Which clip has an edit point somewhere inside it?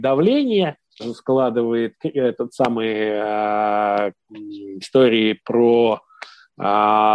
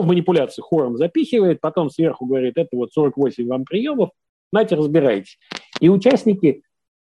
first; 2 cuts; at 1.0 s, 4.8 s

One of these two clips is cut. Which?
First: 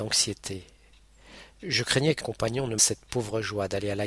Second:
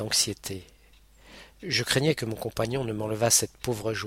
first; 2 cuts; at 2.2 s, 2.8 s

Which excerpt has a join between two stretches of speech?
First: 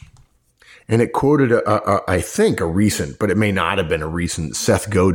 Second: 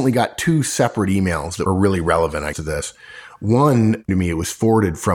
second; 3 cuts; at 1.7 s, 2.5 s, 4.1 s

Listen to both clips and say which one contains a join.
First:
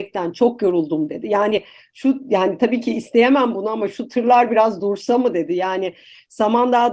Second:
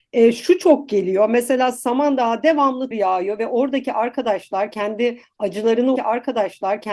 second; 2 cuts; at 2.9 s, 6.0 s

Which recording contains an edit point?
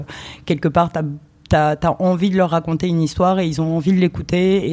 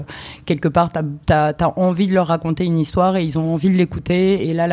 second; 1 cut; at 1.2 s

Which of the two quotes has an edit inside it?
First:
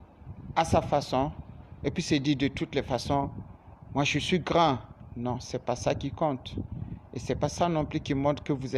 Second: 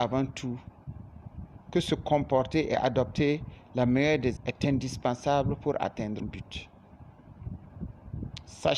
second; 2 cuts; at 4.4 s, 6.2 s

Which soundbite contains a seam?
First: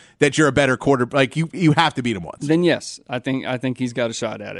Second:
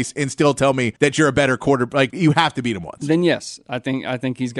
second; 2 cuts; at 1.0 s, 2.1 s

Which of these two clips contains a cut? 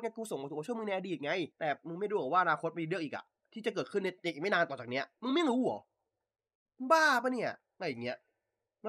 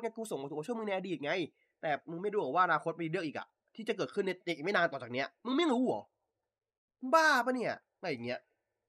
first; 1 cut; at 1.5 s

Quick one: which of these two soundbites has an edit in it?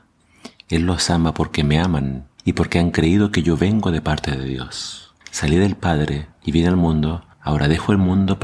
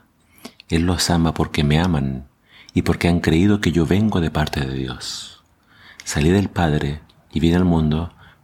first; 4 cuts; at 2.4 s, 5.2 s, 6.3 s, 7.3 s

